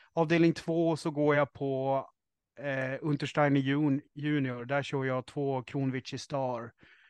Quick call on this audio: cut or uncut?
uncut